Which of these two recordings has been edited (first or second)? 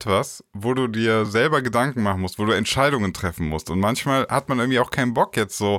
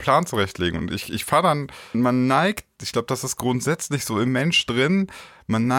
second